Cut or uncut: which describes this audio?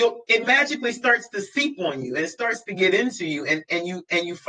uncut